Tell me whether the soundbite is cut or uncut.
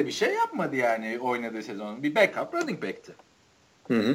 uncut